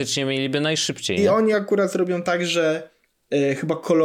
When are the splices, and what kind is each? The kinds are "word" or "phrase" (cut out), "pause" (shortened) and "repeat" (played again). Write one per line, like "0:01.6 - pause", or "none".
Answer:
none